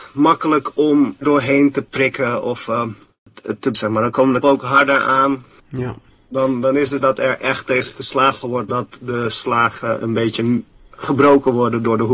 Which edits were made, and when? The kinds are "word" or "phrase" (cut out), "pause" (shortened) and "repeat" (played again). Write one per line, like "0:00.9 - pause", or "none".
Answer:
0:01.2 - word
0:03.7 - word
0:04.4 - word
0:07.0 - word
0:08.7 - word